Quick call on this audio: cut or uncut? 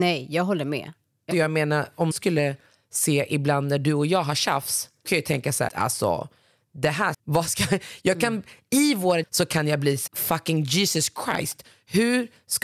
cut